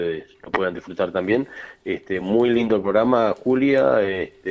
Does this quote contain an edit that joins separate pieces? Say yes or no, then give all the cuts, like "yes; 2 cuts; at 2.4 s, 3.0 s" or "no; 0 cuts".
no; 0 cuts